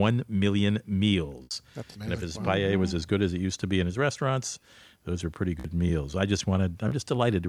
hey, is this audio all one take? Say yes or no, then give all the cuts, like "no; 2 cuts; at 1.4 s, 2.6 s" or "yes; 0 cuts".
yes; 0 cuts